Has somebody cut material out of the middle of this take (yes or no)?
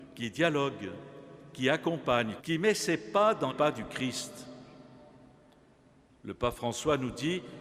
yes